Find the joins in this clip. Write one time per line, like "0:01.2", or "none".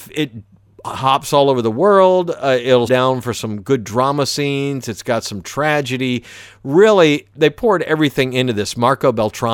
0:02.9